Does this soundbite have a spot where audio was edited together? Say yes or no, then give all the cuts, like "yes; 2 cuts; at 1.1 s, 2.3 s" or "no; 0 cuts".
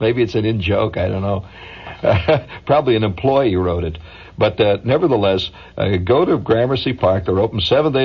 no; 0 cuts